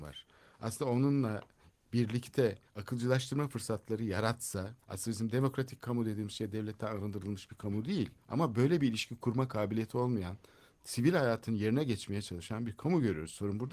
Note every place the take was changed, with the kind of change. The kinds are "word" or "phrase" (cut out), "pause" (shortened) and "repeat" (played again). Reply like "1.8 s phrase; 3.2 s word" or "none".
2.7 s pause; 4.8 s pause; 8.2 s pause